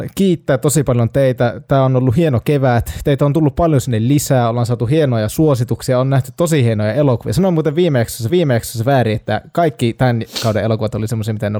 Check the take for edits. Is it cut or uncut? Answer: cut